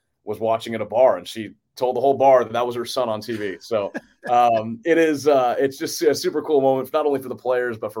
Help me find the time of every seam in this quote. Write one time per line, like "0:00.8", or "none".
none